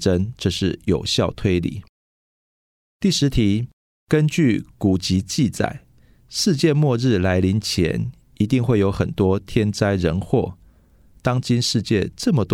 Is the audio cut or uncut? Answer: uncut